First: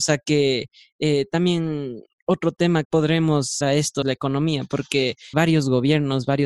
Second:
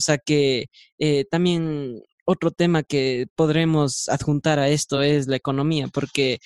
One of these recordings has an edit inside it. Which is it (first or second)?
first